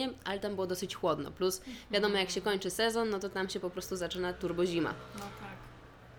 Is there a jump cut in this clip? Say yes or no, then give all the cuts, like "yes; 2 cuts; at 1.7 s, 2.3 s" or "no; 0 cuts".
no; 0 cuts